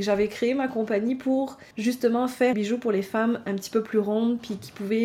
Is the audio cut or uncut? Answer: cut